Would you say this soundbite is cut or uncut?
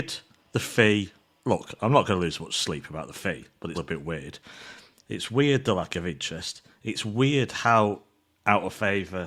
cut